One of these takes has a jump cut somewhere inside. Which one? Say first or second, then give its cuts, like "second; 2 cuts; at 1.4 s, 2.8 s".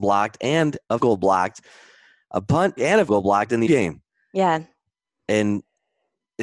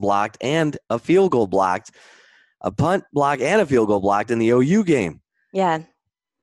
first; 4 cuts; at 1.0 s, 2.8 s, 3.1 s, 3.7 s